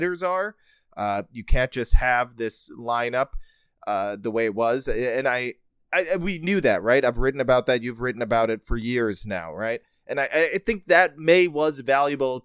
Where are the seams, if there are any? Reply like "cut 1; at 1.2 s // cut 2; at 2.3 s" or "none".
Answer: none